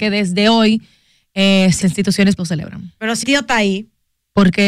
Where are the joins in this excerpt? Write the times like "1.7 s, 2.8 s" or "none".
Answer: 1.8 s, 2.4 s, 3.2 s